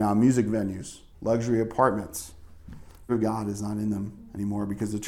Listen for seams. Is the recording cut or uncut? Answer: cut